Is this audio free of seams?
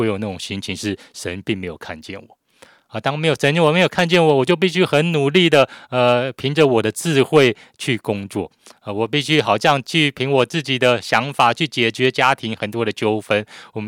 yes; 0 cuts

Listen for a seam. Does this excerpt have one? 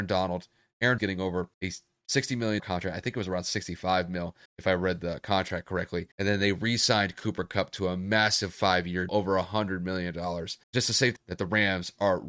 yes; 8 cuts; at 1.0 s, 1.5 s, 2.6 s, 4.5 s, 6.1 s, 9.1 s, 10.6 s, 11.2 s

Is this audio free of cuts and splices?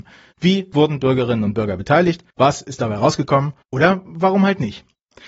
no; 2 cuts; at 2.3 s, 3.6 s

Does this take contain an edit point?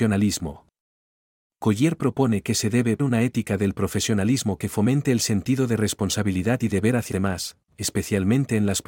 yes; 2 cuts; at 3.0 s, 7.1 s

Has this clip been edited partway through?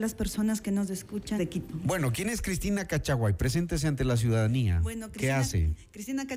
yes; 1 cut; at 1.4 s

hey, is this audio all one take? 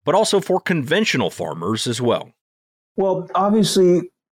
yes; 0 cuts

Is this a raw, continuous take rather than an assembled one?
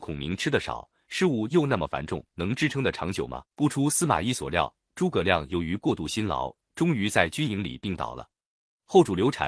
no; 2 cuts; at 2.3 s, 3.5 s

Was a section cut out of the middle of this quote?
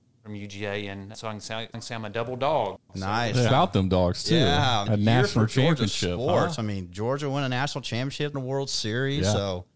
yes; 5 cuts; at 1.1 s, 1.7 s, 3.5 s, 4.9 s, 8.3 s

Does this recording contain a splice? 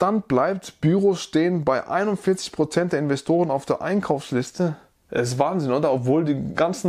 no; 0 cuts

